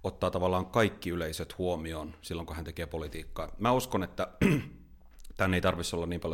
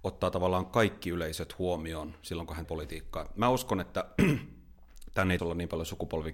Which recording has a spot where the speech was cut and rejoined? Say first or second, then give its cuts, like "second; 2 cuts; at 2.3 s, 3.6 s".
second; 2 cuts; at 2.6 s, 5.4 s